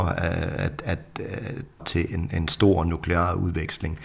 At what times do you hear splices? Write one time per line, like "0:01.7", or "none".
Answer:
0:01.8